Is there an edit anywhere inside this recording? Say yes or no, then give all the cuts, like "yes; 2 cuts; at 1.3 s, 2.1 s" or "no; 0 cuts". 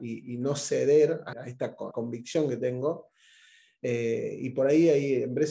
yes; 2 cuts; at 1.3 s, 1.9 s